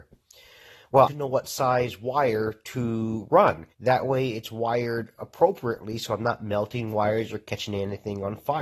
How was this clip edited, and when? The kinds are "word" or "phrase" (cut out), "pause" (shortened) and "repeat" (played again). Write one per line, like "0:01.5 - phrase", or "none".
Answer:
0:01.1 - phrase
0:03.7 - pause